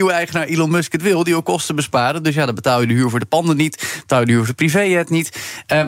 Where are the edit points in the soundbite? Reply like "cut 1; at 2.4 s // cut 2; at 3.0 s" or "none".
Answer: none